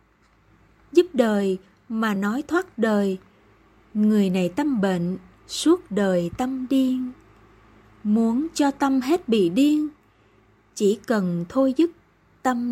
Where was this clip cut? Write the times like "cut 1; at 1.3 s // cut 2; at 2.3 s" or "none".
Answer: none